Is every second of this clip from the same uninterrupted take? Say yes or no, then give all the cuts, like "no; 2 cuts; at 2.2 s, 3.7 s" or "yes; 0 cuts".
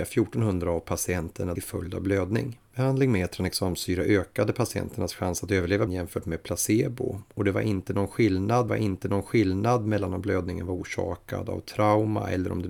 no; 4 cuts; at 1.6 s, 2.7 s, 5.9 s, 8.7 s